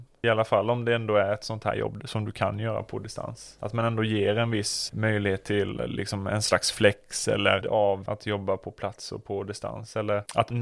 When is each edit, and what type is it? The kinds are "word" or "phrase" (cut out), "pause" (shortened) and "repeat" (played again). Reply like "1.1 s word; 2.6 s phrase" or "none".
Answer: 7.6 s word